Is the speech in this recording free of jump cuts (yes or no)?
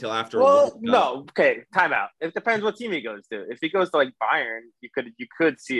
yes